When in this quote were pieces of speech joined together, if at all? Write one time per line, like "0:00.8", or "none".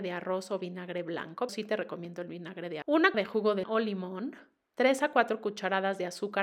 0:01.5
0:02.8
0:03.1
0:03.6